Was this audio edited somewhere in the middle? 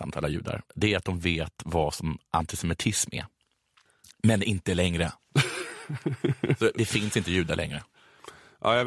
no; 0 cuts

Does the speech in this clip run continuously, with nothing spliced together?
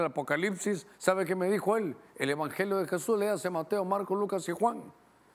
no; 1 cut; at 0.9 s

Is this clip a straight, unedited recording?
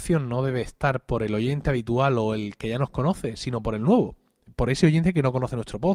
yes; 0 cuts

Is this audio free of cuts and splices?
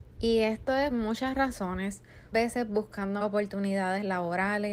no; 3 cuts; at 0.9 s, 2.3 s, 3.2 s

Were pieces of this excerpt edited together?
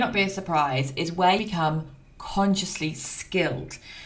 yes; 1 cut; at 1.4 s

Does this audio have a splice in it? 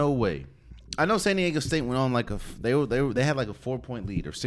no; 0 cuts

